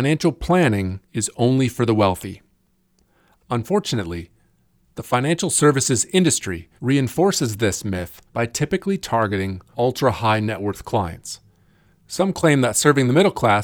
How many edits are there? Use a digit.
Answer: 4